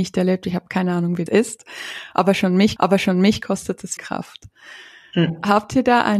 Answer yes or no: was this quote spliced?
yes